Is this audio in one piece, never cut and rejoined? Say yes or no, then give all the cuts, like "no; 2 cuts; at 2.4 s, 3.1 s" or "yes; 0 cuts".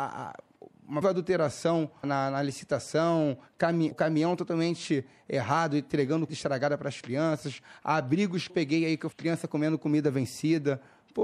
no; 6 cuts; at 1.0 s, 2.0 s, 3.9 s, 6.3 s, 8.5 s, 9.1 s